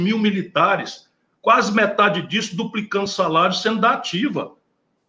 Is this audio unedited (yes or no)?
yes